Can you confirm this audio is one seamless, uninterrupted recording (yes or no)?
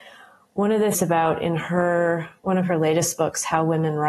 no